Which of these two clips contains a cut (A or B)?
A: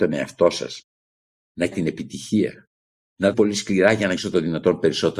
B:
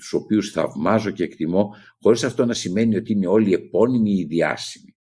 A